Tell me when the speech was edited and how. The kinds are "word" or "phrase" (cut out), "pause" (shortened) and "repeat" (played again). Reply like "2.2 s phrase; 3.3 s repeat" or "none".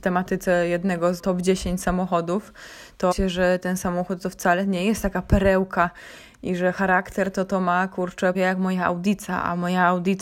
1.2 s word; 3.1 s word; 8.3 s word